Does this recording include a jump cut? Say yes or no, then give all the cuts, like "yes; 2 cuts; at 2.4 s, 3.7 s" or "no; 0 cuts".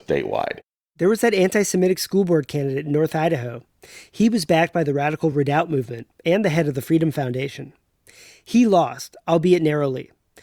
no; 0 cuts